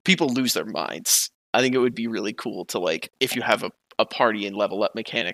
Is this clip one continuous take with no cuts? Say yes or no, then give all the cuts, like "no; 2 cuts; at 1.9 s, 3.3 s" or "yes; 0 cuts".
yes; 0 cuts